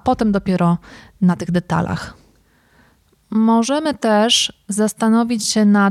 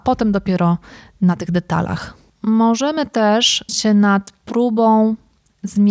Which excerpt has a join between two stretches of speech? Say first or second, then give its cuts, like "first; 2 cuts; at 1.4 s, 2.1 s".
second; 2 cuts; at 2.3 s, 3.7 s